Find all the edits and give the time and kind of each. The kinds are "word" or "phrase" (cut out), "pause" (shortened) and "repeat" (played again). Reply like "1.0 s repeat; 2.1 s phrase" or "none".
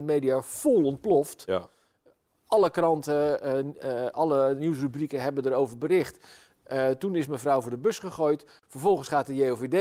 none